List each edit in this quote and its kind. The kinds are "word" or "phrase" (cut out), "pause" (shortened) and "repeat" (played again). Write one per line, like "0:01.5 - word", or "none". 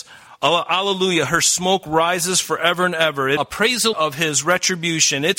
0:03.4 - phrase
0:03.9 - word